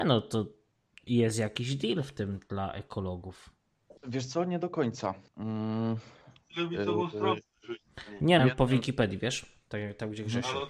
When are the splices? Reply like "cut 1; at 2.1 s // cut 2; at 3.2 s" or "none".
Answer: cut 1; at 4.0 s // cut 2; at 5.3 s // cut 3; at 8.4 s